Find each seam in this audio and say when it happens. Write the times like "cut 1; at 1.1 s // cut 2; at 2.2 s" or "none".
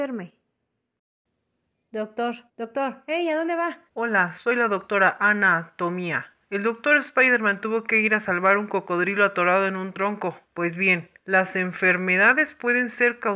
cut 1; at 2.5 s // cut 2; at 3.9 s // cut 3; at 6.4 s // cut 4; at 10.4 s // cut 5; at 11.2 s